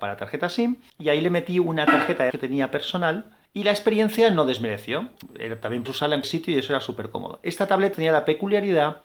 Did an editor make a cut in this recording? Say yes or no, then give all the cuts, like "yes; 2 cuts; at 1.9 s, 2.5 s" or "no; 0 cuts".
yes; 4 cuts; at 2.3 s, 5.9 s, 6.2 s, 7.9 s